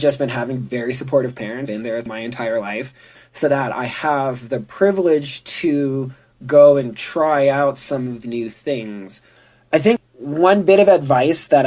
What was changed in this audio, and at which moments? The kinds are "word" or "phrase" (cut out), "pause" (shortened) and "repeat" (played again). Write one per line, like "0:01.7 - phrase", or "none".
0:01.7 - word
0:02.0 - word
0:08.2 - word